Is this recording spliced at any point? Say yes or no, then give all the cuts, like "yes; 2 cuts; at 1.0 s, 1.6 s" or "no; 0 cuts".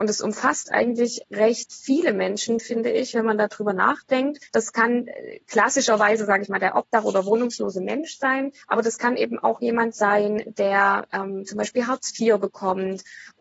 yes; 2 cuts; at 4.5 s, 8.6 s